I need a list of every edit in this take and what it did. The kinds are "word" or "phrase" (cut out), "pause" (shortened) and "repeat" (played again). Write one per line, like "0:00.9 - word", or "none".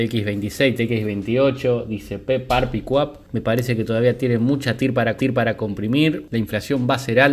0:05.2 - repeat